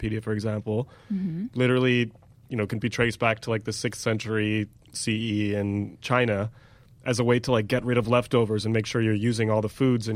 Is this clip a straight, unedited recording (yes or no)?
yes